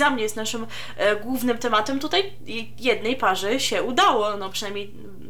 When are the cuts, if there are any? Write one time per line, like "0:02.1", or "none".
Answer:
none